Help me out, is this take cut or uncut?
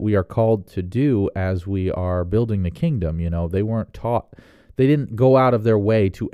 uncut